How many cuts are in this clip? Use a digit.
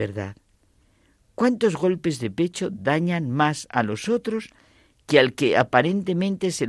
0